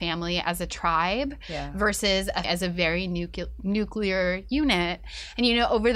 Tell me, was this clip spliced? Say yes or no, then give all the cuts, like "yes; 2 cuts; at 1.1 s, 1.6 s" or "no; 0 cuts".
yes; 1 cut; at 2.4 s